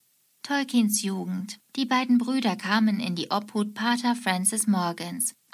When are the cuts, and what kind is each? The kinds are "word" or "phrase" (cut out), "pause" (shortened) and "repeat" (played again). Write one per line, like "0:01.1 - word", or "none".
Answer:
0:01.7 - pause